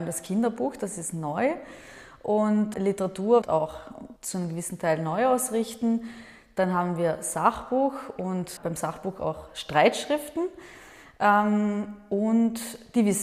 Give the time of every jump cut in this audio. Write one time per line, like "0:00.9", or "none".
0:02.7
0:03.4
0:04.2
0:08.6